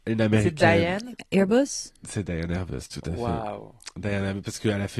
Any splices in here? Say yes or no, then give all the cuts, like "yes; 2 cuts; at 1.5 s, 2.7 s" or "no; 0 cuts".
no; 0 cuts